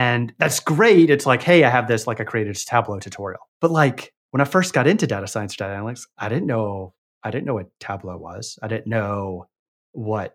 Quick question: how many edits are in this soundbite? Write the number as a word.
one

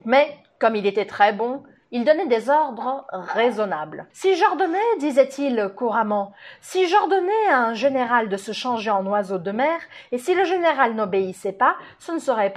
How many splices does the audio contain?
one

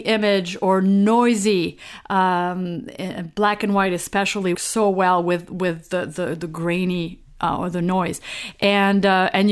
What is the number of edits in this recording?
one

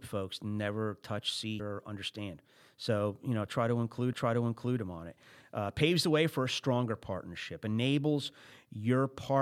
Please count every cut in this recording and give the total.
two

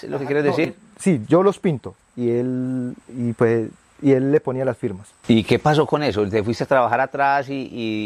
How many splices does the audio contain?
zero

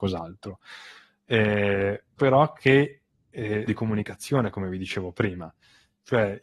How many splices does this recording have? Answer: two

